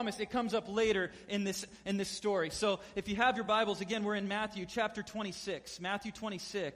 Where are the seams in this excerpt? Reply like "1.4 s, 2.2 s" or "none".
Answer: none